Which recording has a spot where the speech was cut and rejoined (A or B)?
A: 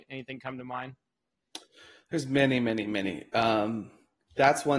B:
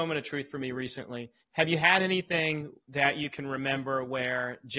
B